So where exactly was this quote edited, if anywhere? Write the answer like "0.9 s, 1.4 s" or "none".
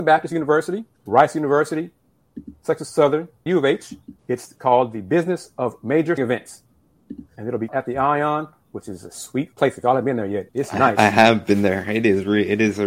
0.9 s, 3.5 s, 4.2 s, 6.2 s, 7.3 s, 7.7 s, 9.5 s, 10.5 s